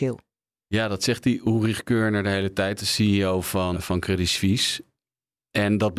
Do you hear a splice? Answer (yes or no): yes